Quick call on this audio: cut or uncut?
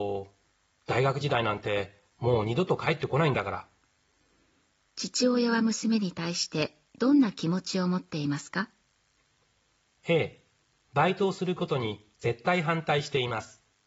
uncut